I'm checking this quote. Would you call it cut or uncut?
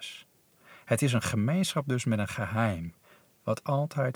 uncut